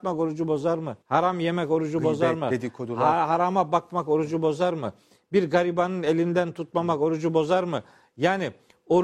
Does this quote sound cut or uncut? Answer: cut